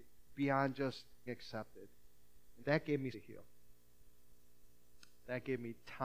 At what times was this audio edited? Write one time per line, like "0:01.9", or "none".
0:01.3
0:02.6
0:03.1